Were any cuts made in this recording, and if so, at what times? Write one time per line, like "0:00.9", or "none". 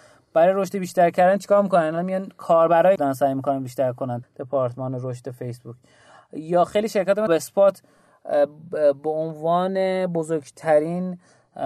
0:03.0
0:04.2
0:07.3